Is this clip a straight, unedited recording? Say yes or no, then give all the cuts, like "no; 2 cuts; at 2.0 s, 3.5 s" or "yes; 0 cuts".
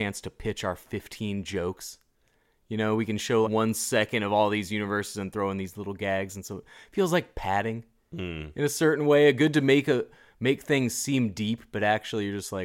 no; 1 cut; at 3.4 s